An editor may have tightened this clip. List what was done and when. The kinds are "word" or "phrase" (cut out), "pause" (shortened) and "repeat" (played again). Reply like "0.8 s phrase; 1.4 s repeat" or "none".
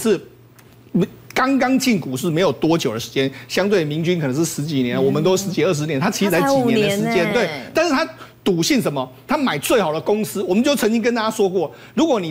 none